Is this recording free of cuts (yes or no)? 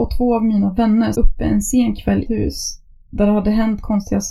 no